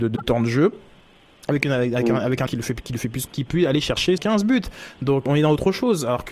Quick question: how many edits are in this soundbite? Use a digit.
4